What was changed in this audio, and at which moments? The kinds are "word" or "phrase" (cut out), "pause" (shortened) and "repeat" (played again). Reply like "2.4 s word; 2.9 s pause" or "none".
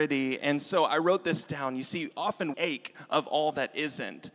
2.5 s phrase